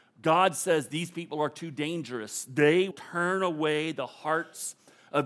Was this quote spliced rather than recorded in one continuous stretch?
yes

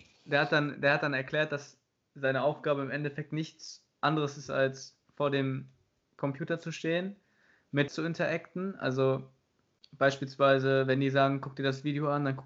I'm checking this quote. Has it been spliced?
yes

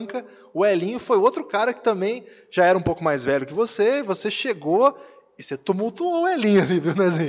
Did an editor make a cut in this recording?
no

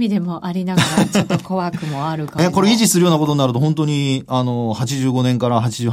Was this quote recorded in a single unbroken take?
no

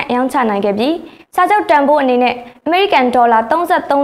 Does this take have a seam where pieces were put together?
no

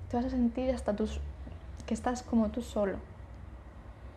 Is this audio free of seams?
yes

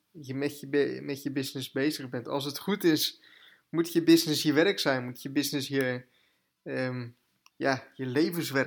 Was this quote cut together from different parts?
no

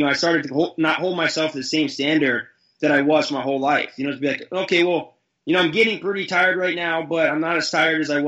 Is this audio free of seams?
yes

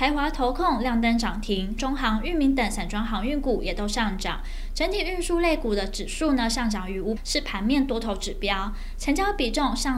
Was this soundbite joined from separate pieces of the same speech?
yes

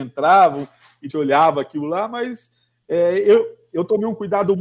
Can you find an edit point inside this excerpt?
yes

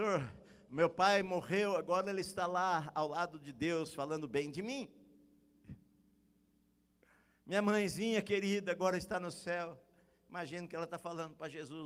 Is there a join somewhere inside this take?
no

